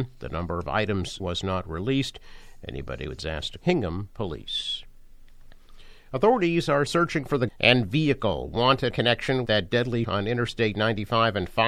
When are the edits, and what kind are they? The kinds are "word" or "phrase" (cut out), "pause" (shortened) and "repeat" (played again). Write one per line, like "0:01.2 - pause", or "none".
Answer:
0:01.2 - word
0:03.2 - word
0:03.6 - word
0:06.9 - word
0:07.5 - word
0:08.9 - word
0:09.5 - word
0:10.0 - word